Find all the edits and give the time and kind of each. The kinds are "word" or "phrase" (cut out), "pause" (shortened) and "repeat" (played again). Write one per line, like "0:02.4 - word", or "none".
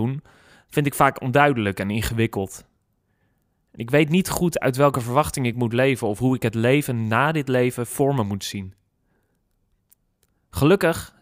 none